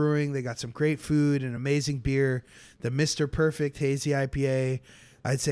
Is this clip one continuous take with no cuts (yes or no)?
yes